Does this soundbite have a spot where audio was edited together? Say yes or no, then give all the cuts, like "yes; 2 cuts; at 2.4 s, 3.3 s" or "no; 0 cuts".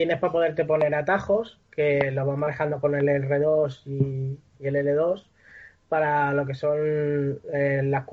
no; 0 cuts